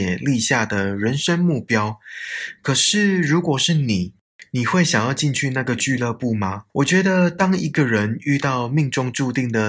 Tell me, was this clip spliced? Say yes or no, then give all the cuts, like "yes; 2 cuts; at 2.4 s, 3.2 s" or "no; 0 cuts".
yes; 1 cut; at 6.7 s